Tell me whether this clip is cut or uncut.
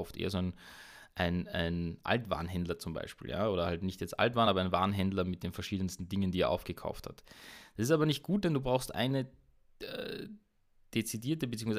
uncut